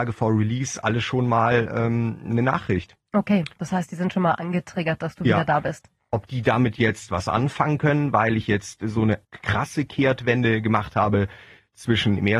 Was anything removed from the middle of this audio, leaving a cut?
yes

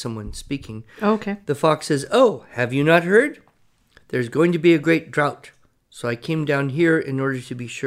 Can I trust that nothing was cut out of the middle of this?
yes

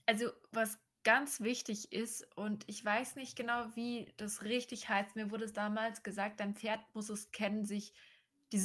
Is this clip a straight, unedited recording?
yes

